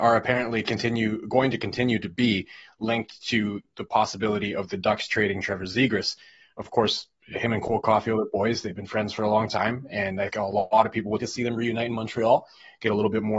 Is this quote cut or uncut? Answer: cut